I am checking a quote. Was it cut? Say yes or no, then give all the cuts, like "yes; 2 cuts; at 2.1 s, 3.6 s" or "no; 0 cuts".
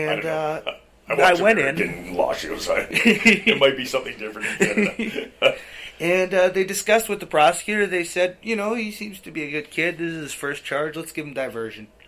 no; 0 cuts